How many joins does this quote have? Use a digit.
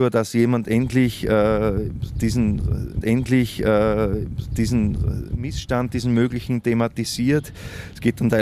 1